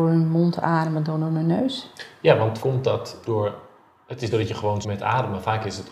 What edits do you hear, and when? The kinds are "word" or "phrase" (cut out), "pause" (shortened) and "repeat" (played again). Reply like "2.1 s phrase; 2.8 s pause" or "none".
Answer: 2.6 s word; 3.3 s word; 4.3 s word; 4.8 s word

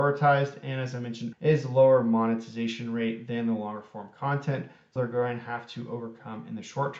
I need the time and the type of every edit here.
1.3 s word; 5.0 s phrase

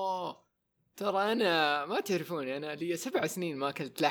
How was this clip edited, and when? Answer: none

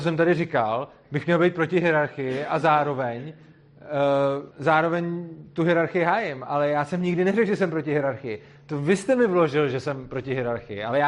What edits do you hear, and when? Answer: 4.5 s pause

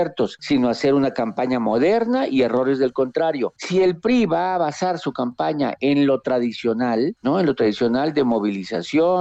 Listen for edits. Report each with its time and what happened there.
none

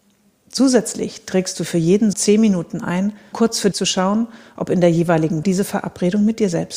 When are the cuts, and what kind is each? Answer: 2.1 s word; 3.3 s word; 3.7 s word; 5.4 s word

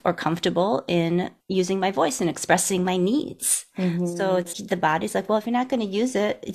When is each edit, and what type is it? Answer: 1.4 s pause; 4.5 s word

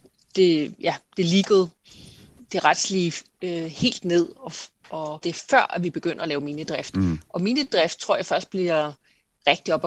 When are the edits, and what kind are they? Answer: 2.4 s word; 5.2 s word

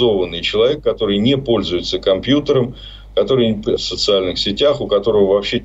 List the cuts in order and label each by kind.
3.8 s word

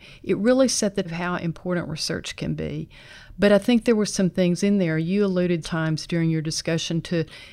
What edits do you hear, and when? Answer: 1.0 s word; 5.6 s word

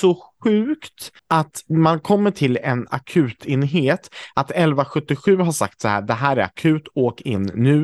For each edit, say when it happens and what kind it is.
1.2 s pause

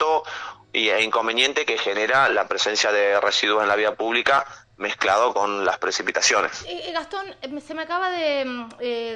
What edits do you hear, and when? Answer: none

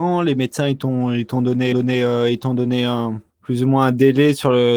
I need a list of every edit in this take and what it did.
1.7 s repeat; 3.3 s pause

